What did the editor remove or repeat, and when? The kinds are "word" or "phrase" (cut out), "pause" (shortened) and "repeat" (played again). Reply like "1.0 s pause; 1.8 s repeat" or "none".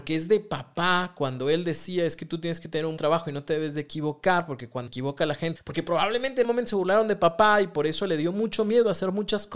3.0 s word; 4.9 s word; 5.6 s phrase; 6.4 s word